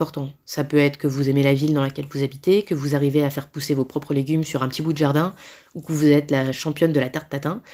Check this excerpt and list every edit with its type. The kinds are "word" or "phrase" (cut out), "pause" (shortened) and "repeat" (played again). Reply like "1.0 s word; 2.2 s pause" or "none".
none